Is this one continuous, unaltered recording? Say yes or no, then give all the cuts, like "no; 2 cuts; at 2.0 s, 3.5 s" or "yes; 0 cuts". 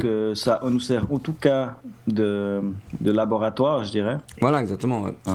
yes; 0 cuts